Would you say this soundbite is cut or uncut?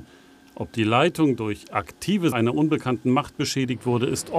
cut